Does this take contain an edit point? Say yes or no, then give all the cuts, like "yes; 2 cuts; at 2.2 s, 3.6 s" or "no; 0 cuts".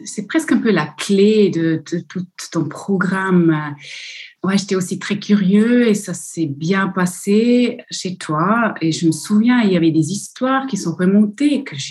no; 0 cuts